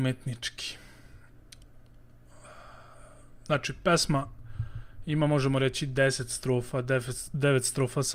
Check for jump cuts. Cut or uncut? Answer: uncut